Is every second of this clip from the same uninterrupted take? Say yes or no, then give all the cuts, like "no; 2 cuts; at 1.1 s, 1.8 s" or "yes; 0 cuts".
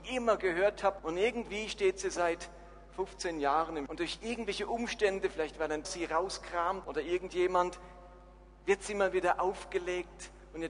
no; 4 cuts; at 1.0 s, 3.9 s, 5.8 s, 6.8 s